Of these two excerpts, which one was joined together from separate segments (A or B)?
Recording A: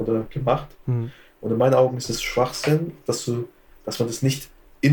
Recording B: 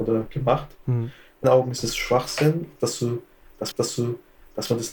B